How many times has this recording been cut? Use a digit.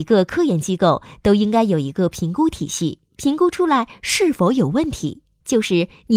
1